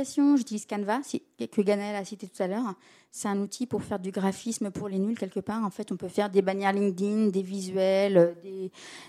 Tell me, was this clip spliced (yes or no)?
no